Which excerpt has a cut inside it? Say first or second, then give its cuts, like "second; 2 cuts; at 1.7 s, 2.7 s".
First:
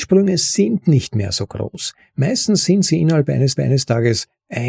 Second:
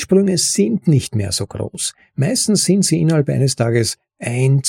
first; 1 cut; at 3.6 s